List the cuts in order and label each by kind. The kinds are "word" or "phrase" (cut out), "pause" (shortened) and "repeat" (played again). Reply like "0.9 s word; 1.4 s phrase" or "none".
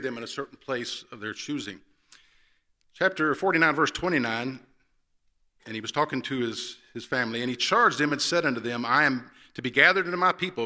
none